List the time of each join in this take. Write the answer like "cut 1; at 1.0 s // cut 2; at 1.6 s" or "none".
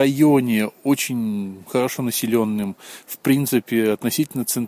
none